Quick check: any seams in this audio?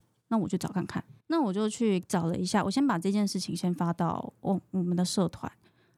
yes; 1 cut; at 1.2 s

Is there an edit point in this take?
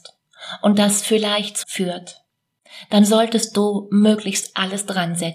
yes; 1 cut; at 1.6 s

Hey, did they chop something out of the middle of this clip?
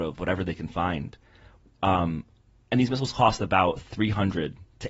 no; 0 cuts

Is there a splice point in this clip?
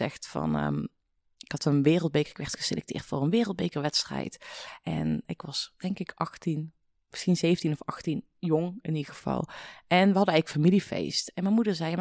no; 0 cuts

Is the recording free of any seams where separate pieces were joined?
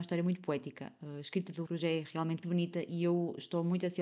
no; 2 cuts; at 1.7 s, 2.4 s

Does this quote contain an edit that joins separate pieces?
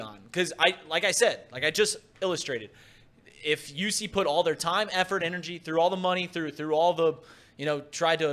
no; 0 cuts

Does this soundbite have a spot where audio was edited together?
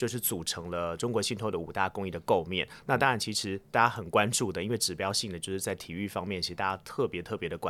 no; 0 cuts

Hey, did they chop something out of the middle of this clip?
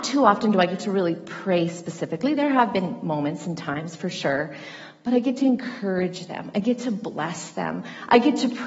no; 0 cuts

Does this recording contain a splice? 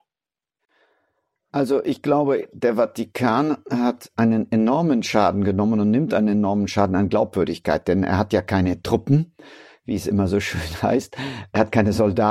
no; 0 cuts

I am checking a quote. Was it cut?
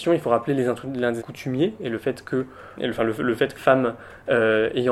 yes; 3 cuts; at 1.2 s, 2.8 s, 3.6 s

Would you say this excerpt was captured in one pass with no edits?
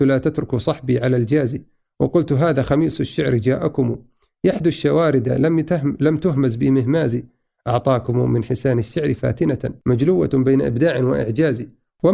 yes; 0 cuts

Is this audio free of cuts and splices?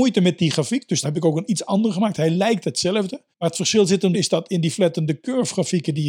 no; 3 cuts; at 1.0 s, 3.3 s, 4.1 s

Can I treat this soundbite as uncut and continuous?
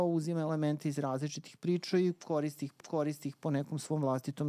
no; 1 cut; at 2.8 s

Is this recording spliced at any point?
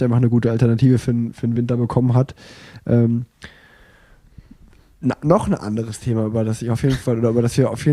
no; 0 cuts

